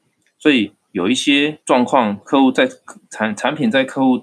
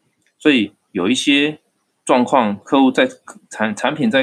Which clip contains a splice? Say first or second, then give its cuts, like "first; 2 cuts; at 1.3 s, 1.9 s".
first; 1 cut; at 1.6 s